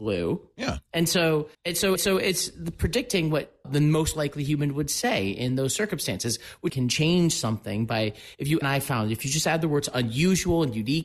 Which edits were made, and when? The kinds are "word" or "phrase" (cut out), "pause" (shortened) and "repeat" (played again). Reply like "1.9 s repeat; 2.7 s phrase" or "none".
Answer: 1.5 s pause; 2.0 s repeat; 3.6 s word; 6.7 s phrase; 8.6 s phrase